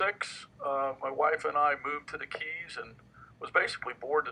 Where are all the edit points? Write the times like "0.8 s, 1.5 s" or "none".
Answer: none